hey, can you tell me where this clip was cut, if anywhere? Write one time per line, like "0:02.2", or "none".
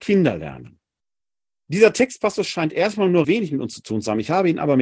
0:01.2
0:03.2